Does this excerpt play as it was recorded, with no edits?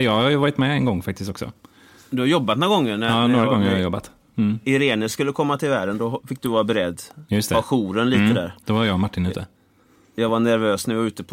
yes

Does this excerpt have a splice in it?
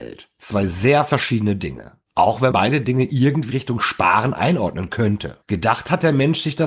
yes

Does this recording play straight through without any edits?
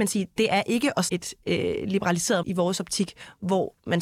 no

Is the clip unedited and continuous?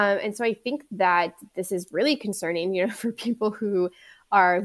yes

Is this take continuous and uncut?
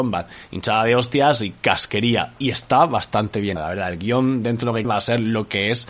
no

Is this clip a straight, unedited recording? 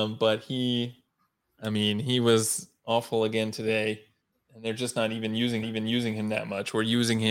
no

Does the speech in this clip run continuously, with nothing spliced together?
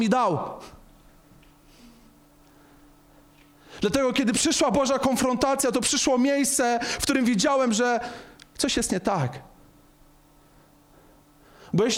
yes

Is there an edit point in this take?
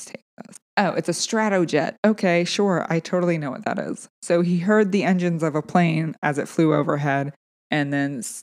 no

